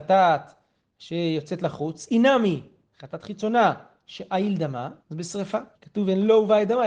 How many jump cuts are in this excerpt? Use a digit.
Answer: 2